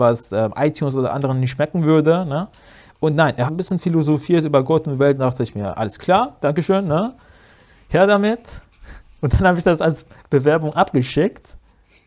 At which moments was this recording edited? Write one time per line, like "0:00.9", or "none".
0:03.5